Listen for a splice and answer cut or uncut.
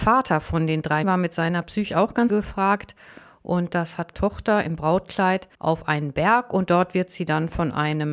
cut